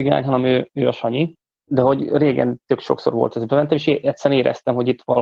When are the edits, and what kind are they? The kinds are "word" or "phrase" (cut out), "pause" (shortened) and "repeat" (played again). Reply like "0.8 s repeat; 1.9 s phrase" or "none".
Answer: none